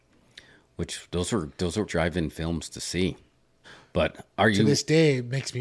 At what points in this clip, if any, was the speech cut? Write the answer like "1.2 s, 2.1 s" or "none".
1.9 s, 3.6 s